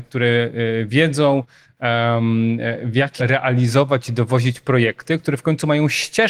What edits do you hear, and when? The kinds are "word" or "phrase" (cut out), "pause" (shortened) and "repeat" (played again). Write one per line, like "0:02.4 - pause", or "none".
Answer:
0:03.2 - word

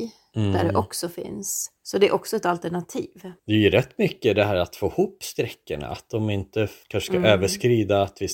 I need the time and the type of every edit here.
0:01.8 - pause
0:03.4 - pause
0:06.8 - pause

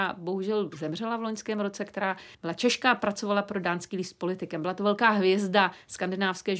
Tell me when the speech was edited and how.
0:02.3 - pause

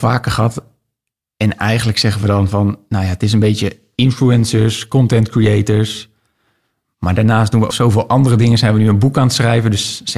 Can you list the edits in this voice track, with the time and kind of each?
0:07.7 - word

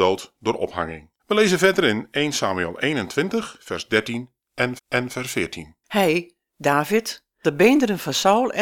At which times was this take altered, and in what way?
0:01.2 - pause
0:04.8 - repeat
0:05.8 - pause
0:07.4 - word

